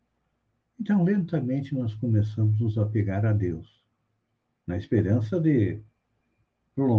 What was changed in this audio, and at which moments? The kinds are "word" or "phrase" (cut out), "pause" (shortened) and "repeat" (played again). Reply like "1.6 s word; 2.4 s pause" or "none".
none